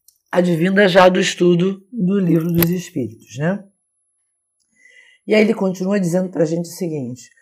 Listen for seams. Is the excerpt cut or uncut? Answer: uncut